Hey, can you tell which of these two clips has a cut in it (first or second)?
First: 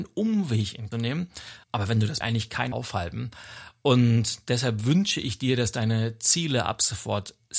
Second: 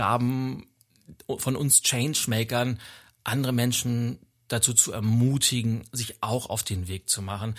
first